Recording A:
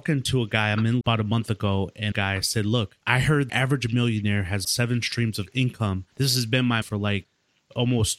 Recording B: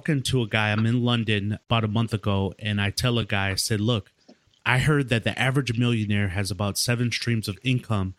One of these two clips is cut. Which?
A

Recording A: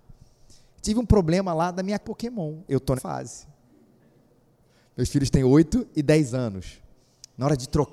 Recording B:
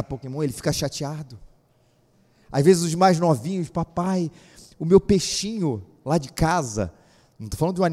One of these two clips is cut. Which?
A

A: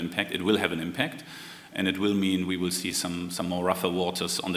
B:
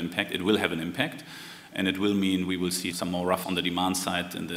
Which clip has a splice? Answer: B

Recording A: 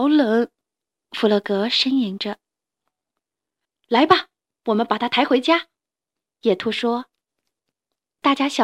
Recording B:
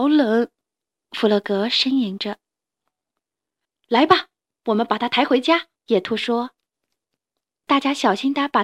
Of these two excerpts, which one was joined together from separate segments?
B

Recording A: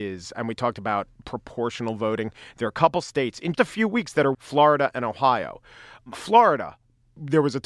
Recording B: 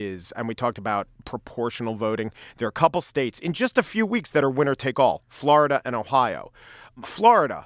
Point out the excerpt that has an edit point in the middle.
A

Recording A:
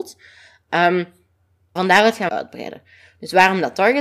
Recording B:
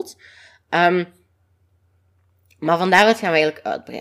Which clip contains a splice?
A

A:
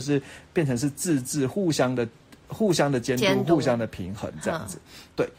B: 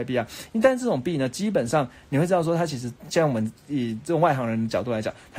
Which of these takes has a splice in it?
B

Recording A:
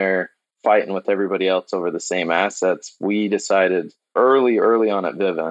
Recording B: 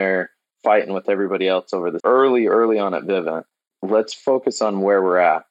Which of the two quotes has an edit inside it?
B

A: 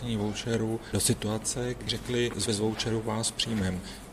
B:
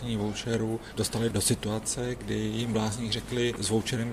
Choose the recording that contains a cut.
A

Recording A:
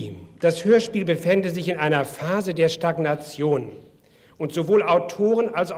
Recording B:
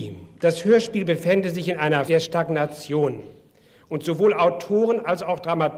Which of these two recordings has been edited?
B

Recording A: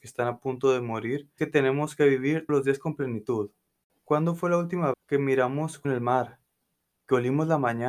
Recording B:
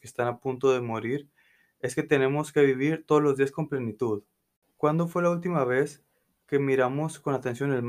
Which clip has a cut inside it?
A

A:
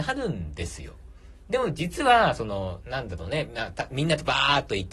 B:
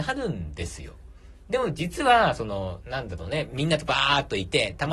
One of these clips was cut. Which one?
B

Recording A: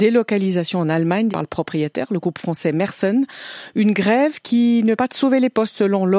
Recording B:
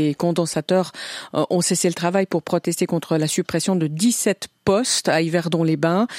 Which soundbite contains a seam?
A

